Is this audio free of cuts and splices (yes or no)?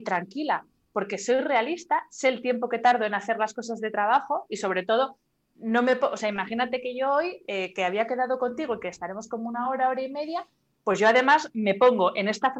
yes